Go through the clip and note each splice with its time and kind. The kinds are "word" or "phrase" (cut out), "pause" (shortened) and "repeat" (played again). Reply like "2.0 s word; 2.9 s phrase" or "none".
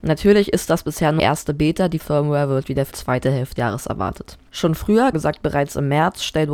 1.2 s word; 2.0 s word; 2.9 s word; 3.6 s word; 5.1 s word